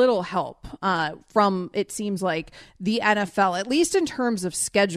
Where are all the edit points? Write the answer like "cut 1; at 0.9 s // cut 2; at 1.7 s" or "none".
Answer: none

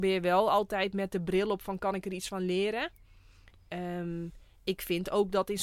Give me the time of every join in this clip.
none

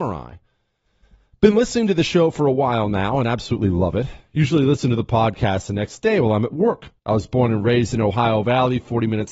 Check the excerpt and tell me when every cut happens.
cut 1; at 7.0 s

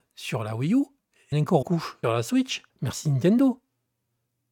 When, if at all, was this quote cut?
cut 1; at 1.3 s // cut 2; at 1.6 s // cut 3; at 2.0 s // cut 4; at 2.7 s

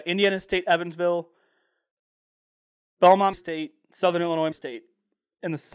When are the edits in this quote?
cut 1; at 3.3 s // cut 2; at 4.5 s

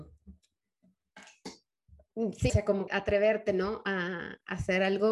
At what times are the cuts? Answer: cut 1; at 2.5 s // cut 2; at 2.9 s

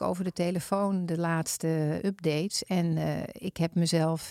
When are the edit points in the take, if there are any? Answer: none

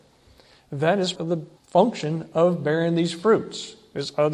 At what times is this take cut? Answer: cut 1; at 1.1 s // cut 2; at 1.6 s

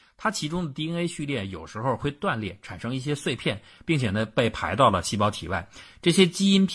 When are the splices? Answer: none

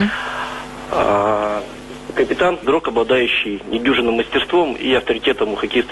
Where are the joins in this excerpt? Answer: cut 1; at 2.6 s

